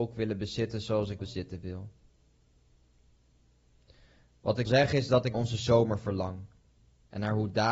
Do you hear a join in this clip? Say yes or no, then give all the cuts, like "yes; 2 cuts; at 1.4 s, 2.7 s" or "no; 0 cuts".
yes; 3 cuts; at 1.2 s, 4.7 s, 5.3 s